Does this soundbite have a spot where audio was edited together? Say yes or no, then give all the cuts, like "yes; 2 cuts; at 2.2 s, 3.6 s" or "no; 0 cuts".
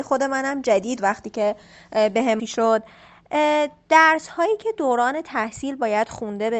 yes; 3 cuts; at 1.0 s, 2.4 s, 4.7 s